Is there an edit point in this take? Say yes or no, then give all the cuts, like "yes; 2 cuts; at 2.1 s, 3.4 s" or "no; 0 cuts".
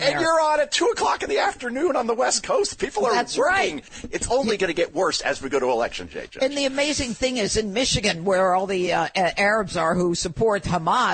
no; 0 cuts